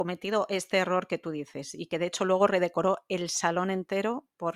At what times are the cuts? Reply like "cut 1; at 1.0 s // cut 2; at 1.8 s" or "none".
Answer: none